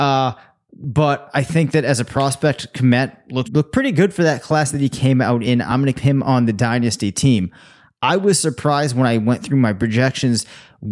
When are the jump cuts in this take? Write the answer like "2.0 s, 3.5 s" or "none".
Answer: 3.4 s, 5.9 s